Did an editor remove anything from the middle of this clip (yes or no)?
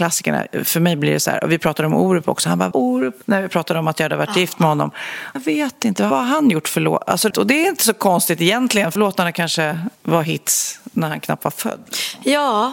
yes